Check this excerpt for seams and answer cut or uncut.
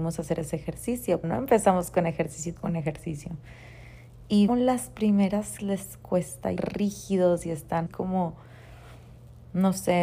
cut